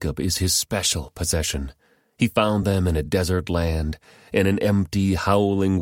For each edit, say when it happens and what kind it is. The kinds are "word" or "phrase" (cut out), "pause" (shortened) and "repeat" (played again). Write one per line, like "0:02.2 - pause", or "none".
none